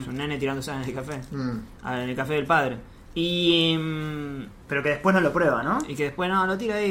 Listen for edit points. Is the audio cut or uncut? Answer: uncut